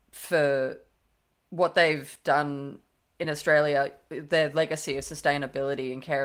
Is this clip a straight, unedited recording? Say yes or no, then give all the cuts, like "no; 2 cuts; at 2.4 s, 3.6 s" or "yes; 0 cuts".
yes; 0 cuts